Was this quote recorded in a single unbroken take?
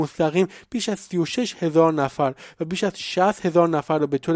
yes; 0 cuts

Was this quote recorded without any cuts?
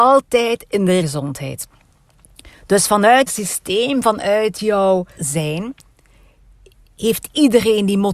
no; 3 cuts; at 1.0 s, 3.3 s, 5.2 s

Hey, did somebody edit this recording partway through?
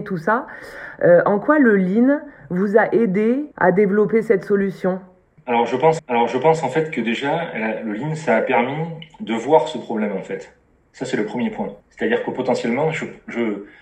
yes; 3 cuts; at 3.5 s, 6.0 s, 11.8 s

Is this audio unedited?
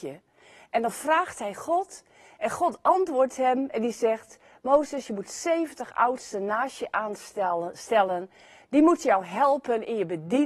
yes; 0 cuts

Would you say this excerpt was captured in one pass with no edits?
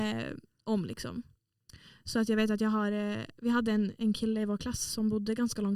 yes; 0 cuts

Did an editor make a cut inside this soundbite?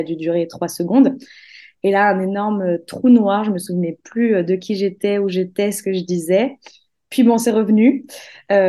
no; 0 cuts

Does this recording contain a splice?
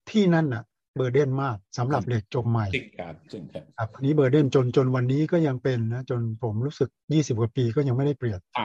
yes; 1 cut; at 1.7 s

